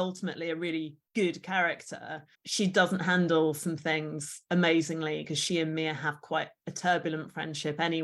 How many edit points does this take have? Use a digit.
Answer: 2